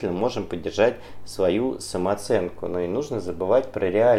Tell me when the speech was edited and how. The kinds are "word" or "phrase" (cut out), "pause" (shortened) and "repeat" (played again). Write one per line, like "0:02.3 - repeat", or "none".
none